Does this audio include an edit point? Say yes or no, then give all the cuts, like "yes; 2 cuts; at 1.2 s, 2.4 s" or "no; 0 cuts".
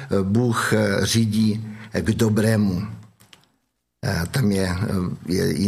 no; 0 cuts